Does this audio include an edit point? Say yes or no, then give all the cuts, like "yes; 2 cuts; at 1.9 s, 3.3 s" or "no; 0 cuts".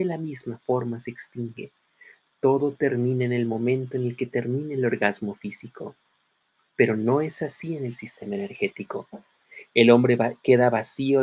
no; 0 cuts